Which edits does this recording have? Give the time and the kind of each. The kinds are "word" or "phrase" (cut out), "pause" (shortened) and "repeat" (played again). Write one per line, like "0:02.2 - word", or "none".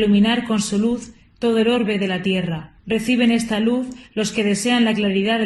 0:02.8 - pause